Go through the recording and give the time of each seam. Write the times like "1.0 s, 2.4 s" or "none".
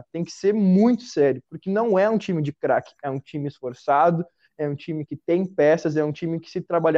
none